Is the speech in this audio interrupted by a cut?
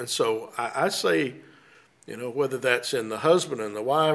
no; 0 cuts

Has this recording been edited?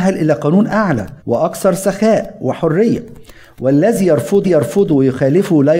yes; 2 cuts; at 1.2 s, 4.4 s

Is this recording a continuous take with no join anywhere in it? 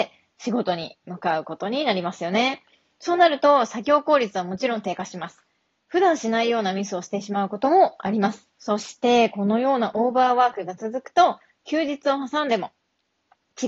no; 1 cut; at 8.5 s

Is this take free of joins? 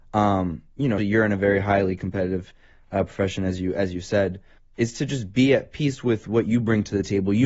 no; 2 cuts; at 1.0 s, 4.6 s

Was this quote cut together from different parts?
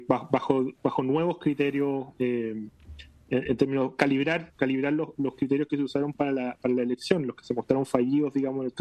no; 0 cuts

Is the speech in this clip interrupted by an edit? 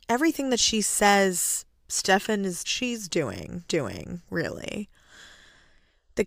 yes; 2 cuts; at 2.6 s, 3.7 s

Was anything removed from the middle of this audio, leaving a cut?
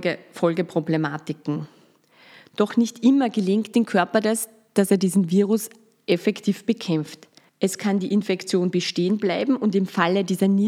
yes; 1 cut; at 7.5 s

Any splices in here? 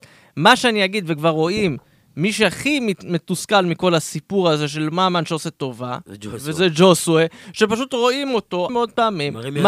yes; 1 cut; at 8.7 s

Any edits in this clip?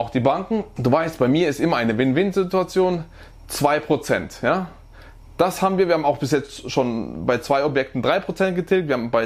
no; 0 cuts

